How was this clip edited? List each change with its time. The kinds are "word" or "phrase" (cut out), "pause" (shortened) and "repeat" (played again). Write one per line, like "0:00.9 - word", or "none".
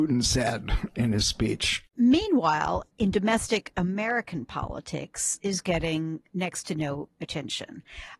0:01.9 - pause
0:05.4 - word